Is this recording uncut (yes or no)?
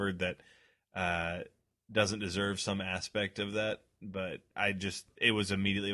no